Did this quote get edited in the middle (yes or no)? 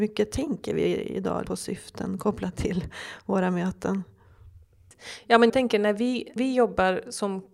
yes